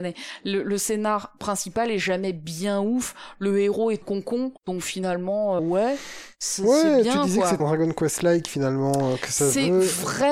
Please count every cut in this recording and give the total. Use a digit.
4